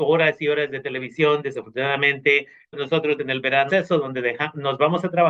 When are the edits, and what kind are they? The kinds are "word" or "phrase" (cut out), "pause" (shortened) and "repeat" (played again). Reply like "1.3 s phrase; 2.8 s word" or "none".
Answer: 2.7 s word; 3.2 s word; 3.7 s word